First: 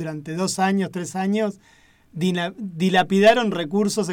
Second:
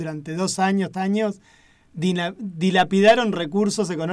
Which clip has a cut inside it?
second; 1 cut; at 0.9 s

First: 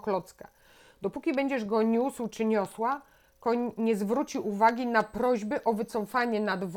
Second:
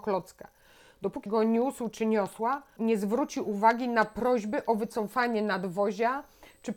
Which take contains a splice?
second; 2 cuts; at 1.3 s, 2.8 s

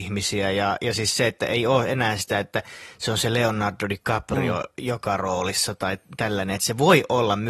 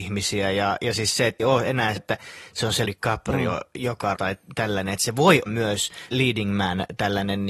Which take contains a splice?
second; 6 cuts; at 1.4 s, 2.0 s, 2.8 s, 4.1 s, 5.5 s, 6.1 s

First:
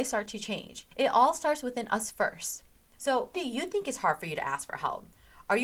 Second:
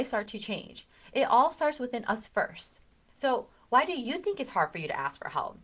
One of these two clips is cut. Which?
first; 2 cuts; at 0.9 s, 3.3 s

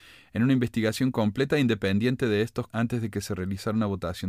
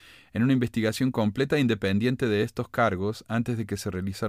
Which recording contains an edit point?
first; 1 cut; at 2.7 s

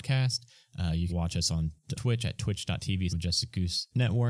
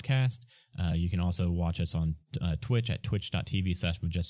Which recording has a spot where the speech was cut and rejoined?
first; 3 cuts; at 1.1 s, 1.9 s, 3.1 s

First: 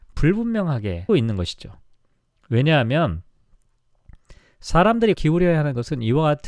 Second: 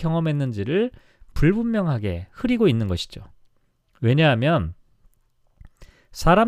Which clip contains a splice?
first; 2 cuts; at 1.1 s, 5.1 s

